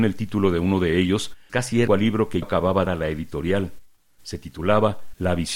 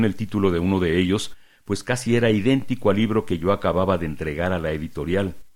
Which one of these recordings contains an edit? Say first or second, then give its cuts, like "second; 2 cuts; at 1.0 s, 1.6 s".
first; 4 cuts; at 1.5 s, 1.9 s, 2.4 s, 2.9 s